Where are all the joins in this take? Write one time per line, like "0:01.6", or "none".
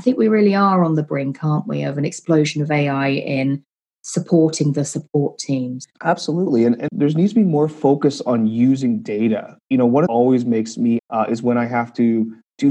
0:05.9
0:06.9
0:10.1
0:11.0

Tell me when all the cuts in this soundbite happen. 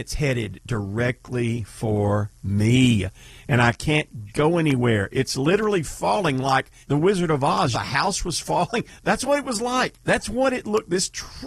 0:06.8
0:07.7
0:10.0

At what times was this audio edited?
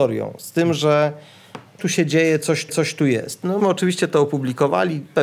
0:01.8
0:02.7
0:03.6

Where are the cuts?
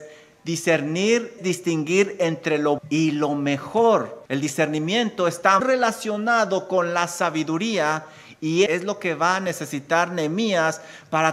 0:01.4
0:02.8
0:04.3
0:05.6
0:08.7

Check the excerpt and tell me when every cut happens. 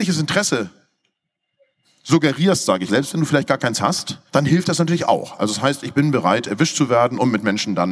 0:02.9
0:04.3

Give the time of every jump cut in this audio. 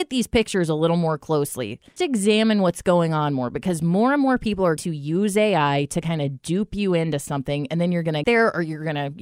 0:02.0
0:04.8
0:08.2

